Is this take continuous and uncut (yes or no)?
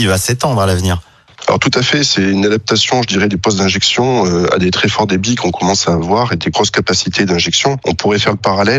yes